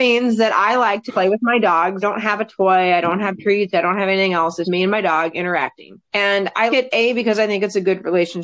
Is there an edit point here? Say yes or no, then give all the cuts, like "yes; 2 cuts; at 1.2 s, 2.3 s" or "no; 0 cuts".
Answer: yes; 5 cuts; at 1.1 s, 2.0 s, 4.6 s, 6.0 s, 6.7 s